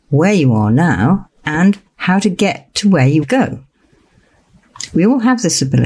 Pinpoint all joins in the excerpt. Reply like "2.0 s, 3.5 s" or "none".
1.4 s, 3.2 s